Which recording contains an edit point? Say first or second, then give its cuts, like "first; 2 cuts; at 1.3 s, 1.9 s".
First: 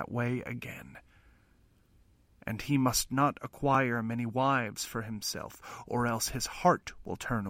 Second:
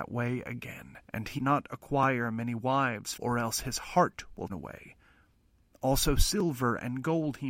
second; 4 cuts; at 1.0 s, 1.4 s, 3.2 s, 4.5 s